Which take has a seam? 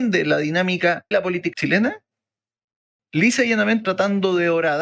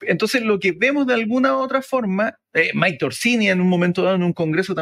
first; 4 cuts; at 1.1 s, 1.5 s, 3.0 s, 3.8 s

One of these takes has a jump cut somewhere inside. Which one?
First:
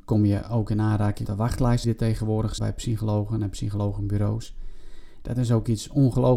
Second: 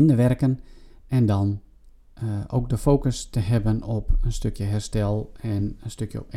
first; 3 cuts; at 1.2 s, 1.8 s, 2.6 s

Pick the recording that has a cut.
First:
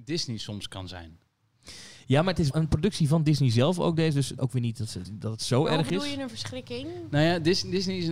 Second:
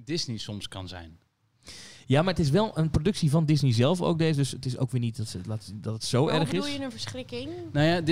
first; 3 cuts; at 2.5 s, 4.4 s, 5.0 s

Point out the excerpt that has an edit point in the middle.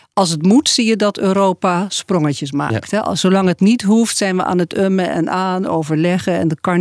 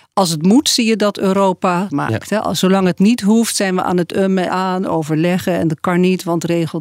second; 2 cuts; at 1.9 s, 4.5 s

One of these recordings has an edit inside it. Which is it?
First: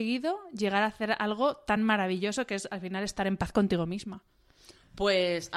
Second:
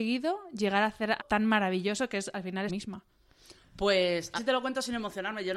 second; 3 cuts; at 1.2 s, 2.7 s, 4.4 s

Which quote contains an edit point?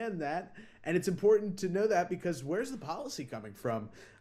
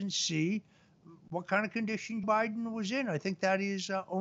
second; 1 cut; at 2.2 s

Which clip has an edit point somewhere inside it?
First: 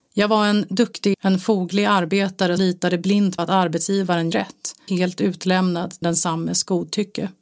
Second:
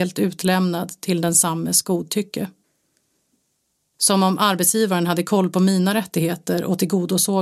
first; 6 cuts; at 1.1 s, 2.6 s, 3.4 s, 4.3 s, 4.9 s, 6.0 s

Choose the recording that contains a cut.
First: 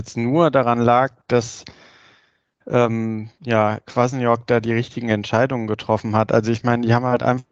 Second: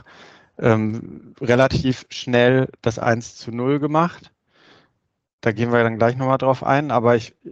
first; 1 cut; at 3.3 s

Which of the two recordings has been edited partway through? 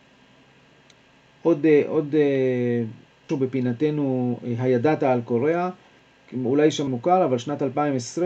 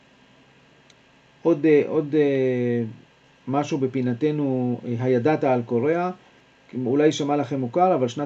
first; 2 cuts; at 3.3 s, 6.9 s

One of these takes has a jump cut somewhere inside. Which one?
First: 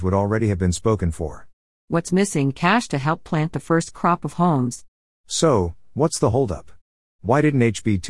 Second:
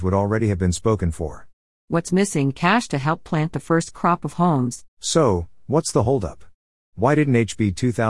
second; 1 cut; at 4.9 s

